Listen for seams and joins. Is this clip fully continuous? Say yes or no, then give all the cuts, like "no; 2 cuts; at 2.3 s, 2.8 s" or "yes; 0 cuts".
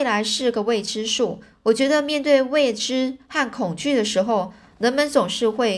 yes; 0 cuts